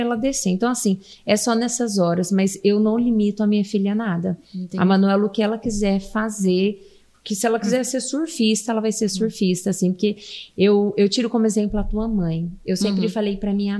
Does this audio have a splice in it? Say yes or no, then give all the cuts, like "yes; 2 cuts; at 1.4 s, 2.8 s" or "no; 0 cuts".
no; 0 cuts